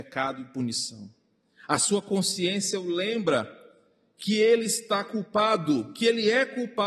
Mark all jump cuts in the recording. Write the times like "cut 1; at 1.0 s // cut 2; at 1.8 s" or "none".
none